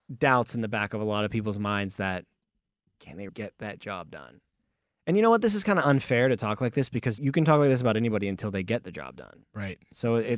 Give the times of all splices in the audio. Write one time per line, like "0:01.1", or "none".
0:03.3
0:07.2

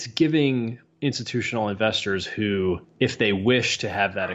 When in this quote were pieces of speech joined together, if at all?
0:02.8

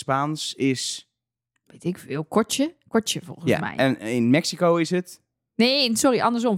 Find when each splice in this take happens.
none

